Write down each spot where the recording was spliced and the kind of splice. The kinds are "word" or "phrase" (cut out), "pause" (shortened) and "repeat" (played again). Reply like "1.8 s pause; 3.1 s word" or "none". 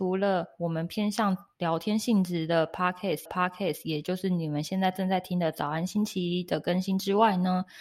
3.3 s repeat